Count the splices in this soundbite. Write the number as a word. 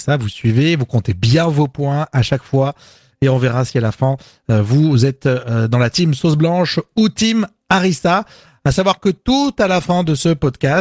zero